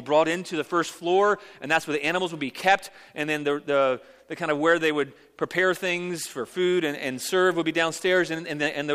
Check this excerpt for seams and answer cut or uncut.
uncut